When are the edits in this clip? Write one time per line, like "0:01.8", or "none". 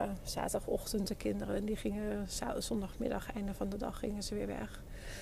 none